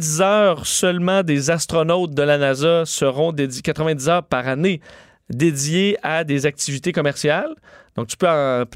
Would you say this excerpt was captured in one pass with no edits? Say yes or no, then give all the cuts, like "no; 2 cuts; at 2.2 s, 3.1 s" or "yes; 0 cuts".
yes; 0 cuts